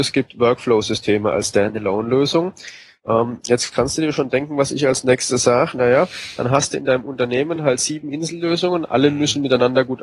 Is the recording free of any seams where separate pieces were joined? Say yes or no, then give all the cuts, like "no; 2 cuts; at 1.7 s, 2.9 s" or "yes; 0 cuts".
yes; 0 cuts